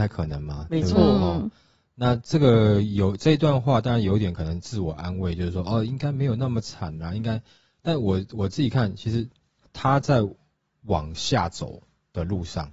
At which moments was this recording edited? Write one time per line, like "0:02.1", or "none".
0:09.6